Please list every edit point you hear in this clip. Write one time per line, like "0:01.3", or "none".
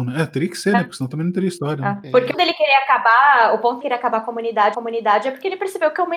0:02.3
0:03.8
0:04.7